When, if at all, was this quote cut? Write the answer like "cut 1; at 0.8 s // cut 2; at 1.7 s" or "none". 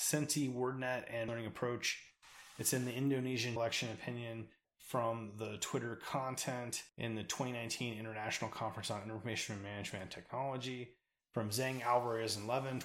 cut 1; at 1.3 s // cut 2; at 3.6 s // cut 3; at 4.6 s // cut 4; at 6.9 s